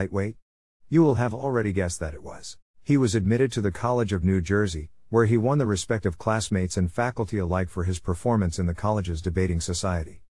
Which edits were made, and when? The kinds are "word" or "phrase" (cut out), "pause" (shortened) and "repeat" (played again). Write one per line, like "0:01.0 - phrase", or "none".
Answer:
0:02.7 - pause

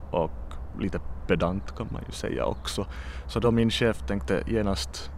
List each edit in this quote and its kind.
none

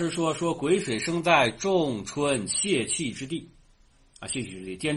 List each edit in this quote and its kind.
none

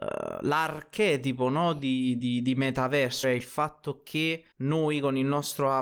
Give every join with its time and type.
0:02.2 - word
0:03.2 - word
0:04.5 - pause

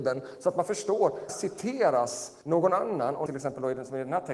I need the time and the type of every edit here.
0:01.3 - word
0:02.4 - pause
0:03.3 - phrase

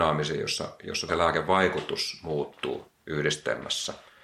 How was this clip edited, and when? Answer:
0:01.1 - word
0:03.0 - pause

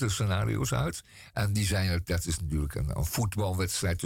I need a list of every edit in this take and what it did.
none

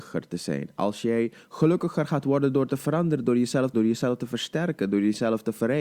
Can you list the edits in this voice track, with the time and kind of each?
0:03.7 - word

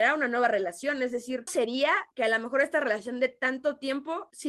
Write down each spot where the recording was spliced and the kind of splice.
0:01.5 - word

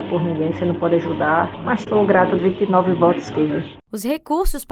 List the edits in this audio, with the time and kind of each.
0:01.8 - phrase
0:02.4 - word
0:03.3 - word

